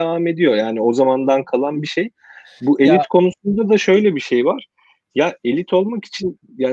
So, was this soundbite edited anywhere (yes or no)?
no